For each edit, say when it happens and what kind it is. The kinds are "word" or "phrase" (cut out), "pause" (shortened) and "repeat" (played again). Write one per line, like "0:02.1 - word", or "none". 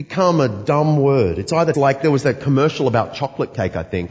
0:01.7 - phrase